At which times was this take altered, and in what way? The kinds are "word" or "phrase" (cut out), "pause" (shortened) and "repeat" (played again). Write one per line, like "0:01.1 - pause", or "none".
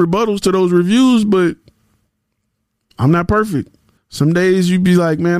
0:04.0 - pause